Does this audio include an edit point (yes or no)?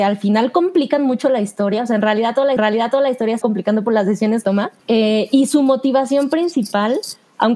yes